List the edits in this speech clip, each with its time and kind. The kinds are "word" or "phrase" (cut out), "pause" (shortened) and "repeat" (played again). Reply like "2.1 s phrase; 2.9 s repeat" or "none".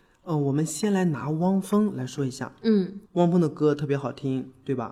3.1 s pause